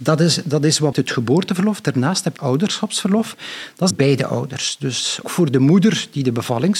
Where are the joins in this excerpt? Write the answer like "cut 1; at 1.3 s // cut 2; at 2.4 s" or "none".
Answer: cut 1; at 0.9 s // cut 2; at 2.4 s // cut 3; at 3.9 s // cut 4; at 5.2 s